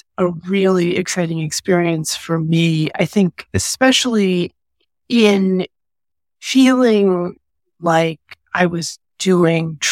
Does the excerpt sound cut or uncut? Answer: uncut